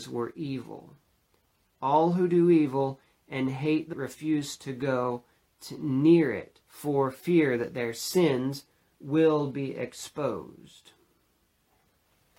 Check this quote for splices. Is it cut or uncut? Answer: cut